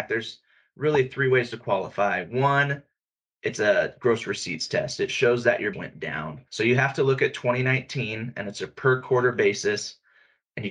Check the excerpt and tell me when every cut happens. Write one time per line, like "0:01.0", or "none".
0:05.7
0:06.5